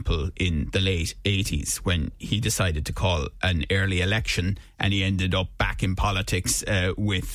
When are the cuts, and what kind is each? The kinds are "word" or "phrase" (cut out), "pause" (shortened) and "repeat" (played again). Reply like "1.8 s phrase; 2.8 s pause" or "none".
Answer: none